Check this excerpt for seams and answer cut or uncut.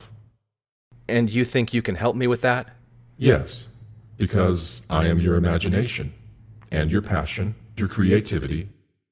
cut